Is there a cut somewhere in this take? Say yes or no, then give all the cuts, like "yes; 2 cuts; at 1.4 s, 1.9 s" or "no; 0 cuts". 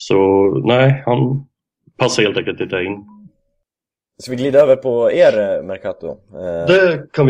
no; 0 cuts